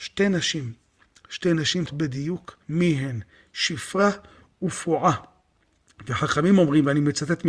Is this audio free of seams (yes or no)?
no